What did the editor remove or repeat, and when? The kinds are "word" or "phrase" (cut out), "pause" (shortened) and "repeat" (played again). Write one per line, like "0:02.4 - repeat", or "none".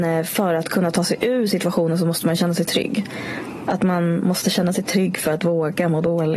none